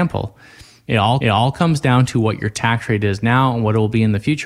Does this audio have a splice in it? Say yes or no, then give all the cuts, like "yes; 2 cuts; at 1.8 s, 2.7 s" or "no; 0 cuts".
yes; 1 cut; at 1.2 s